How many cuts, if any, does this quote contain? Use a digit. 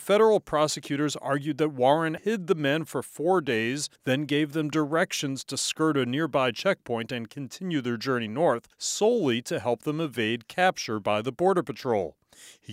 3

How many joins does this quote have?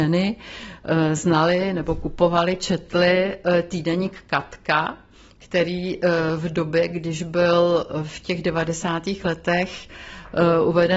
0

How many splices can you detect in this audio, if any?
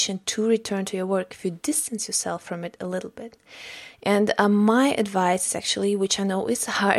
0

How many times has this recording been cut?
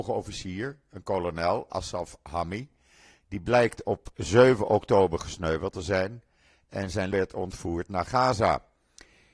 1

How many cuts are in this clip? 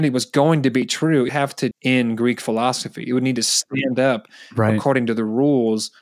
2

